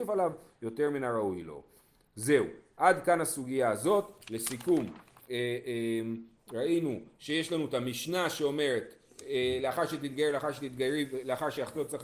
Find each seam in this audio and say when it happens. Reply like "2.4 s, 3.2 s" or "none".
none